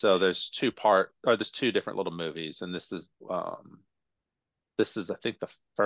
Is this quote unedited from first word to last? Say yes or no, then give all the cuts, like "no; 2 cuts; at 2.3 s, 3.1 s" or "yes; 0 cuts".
no; 1 cut; at 3.2 s